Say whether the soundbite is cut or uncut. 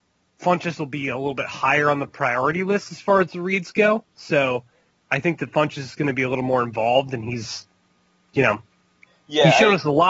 uncut